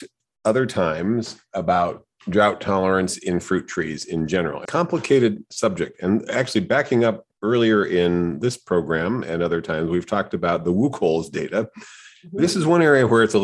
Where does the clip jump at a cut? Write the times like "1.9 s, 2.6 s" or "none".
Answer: 4.6 s, 7.3 s